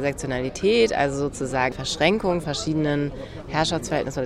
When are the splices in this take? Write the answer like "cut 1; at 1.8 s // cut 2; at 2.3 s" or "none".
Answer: cut 1; at 1.7 s // cut 2; at 2.4 s